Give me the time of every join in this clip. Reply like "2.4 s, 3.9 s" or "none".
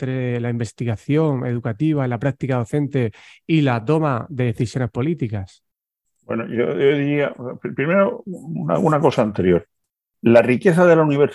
none